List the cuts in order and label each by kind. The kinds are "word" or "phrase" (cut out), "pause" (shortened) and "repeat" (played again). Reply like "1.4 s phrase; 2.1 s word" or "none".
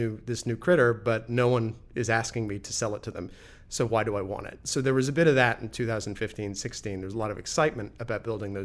none